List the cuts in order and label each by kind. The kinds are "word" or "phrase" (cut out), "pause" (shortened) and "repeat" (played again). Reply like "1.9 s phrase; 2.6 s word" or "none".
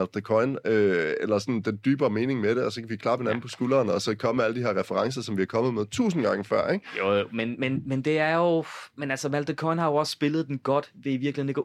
none